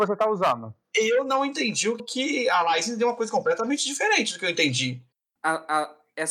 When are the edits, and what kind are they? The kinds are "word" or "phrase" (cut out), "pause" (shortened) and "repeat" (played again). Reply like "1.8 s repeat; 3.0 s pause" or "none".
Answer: 2.0 s word